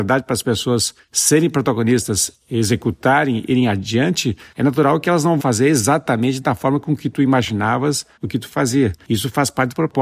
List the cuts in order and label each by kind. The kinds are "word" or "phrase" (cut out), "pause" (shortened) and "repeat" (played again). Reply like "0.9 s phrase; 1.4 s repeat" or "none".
5.4 s word